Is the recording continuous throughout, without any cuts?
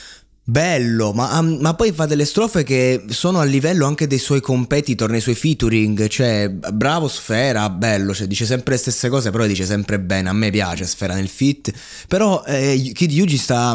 yes; 0 cuts

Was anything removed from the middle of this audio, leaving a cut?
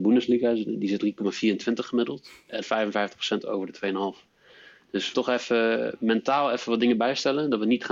yes; 4 cuts; at 1.0 s, 2.6 s, 4.3 s, 5.1 s

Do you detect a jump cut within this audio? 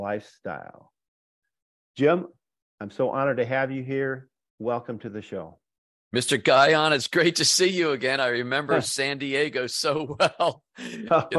no; 0 cuts

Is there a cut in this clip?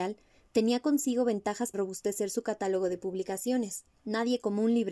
yes; 2 cuts; at 1.7 s, 3.9 s

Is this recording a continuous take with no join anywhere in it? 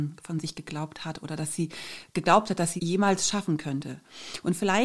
no; 1 cut; at 2.8 s

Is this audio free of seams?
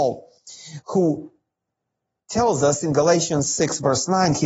yes; 0 cuts

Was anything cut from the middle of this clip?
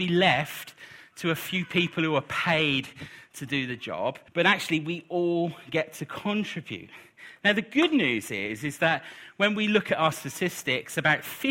yes; 1 cut; at 4.3 s

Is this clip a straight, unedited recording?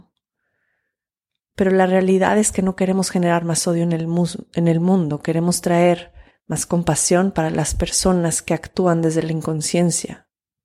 no; 1 cut; at 6.3 s

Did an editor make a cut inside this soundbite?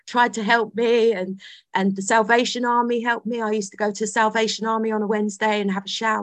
no; 0 cuts

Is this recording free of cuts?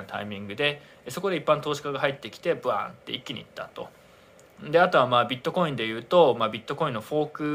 yes; 0 cuts

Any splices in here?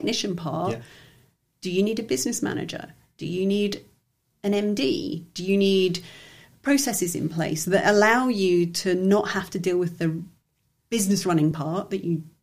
no; 0 cuts

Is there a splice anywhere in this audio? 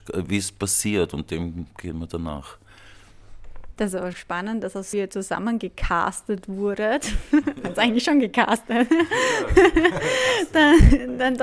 yes; 2 cuts; at 4.1 s, 4.9 s

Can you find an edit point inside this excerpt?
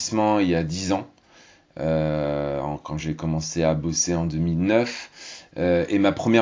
no; 0 cuts

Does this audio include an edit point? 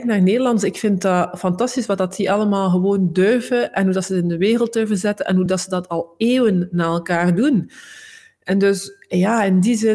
no; 0 cuts

